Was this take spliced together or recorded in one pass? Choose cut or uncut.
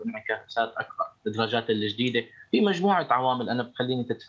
uncut